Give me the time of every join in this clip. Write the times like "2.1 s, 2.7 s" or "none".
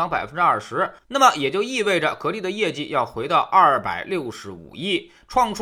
1.0 s